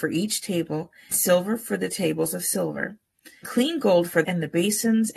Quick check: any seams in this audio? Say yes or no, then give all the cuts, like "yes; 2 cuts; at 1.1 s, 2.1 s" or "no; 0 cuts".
yes; 3 cuts; at 1.1 s, 3.4 s, 4.2 s